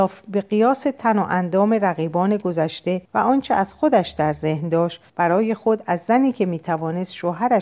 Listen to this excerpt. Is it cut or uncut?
cut